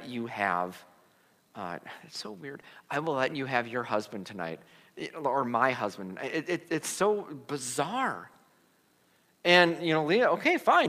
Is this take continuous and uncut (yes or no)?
yes